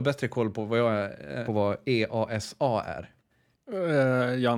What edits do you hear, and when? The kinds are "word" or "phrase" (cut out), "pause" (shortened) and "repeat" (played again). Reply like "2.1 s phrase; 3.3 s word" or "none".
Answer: 1.4 s phrase